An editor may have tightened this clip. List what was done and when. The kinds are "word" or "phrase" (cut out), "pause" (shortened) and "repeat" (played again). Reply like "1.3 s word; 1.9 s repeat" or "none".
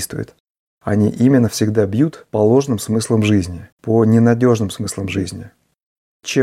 3.7 s pause